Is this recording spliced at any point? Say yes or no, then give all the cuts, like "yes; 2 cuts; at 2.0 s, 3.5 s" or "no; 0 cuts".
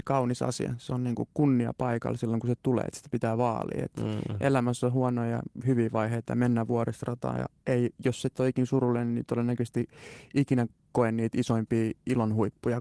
no; 0 cuts